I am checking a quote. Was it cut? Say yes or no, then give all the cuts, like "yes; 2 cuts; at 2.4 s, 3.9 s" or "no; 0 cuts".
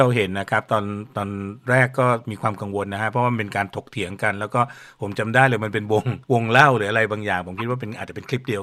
yes; 1 cut; at 6.2 s